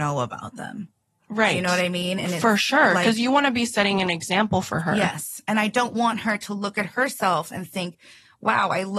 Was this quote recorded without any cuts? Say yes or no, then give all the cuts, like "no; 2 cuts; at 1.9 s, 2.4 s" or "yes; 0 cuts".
yes; 0 cuts